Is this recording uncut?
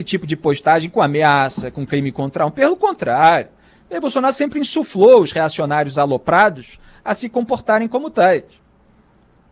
yes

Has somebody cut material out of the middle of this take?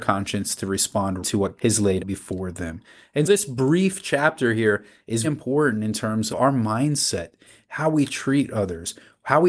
yes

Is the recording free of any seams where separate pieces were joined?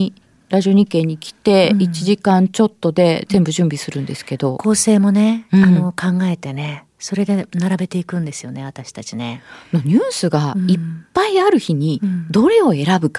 yes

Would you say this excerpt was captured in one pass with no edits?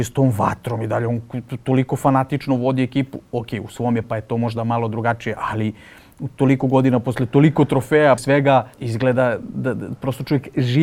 no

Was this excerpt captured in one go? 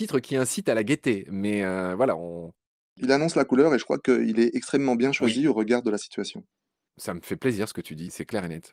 yes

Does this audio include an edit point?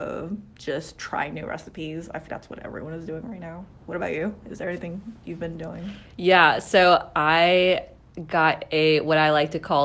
yes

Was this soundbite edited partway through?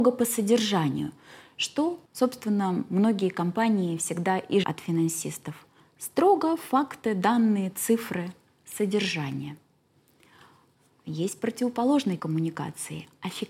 yes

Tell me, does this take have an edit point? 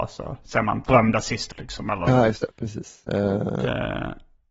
yes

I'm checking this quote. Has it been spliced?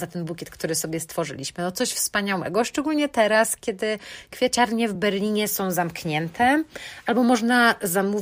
no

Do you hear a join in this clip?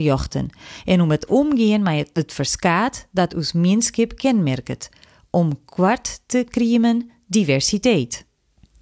no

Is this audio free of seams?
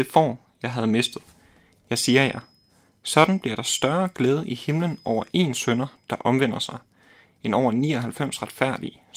yes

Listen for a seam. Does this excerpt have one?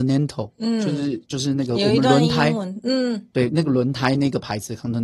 no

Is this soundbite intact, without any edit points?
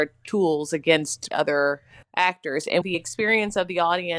no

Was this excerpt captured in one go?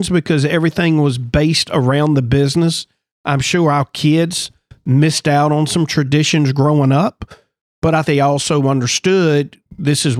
no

